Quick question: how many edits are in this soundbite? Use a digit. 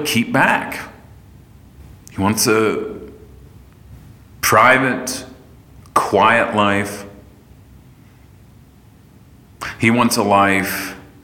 0